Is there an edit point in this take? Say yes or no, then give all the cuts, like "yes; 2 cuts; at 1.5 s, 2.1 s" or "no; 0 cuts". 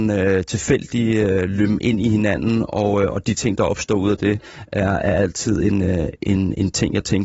no; 0 cuts